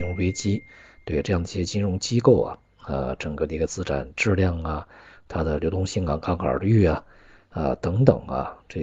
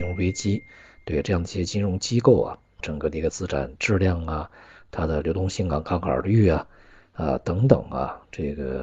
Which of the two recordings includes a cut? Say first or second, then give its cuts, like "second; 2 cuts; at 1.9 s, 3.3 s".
second; 1 cut; at 2.8 s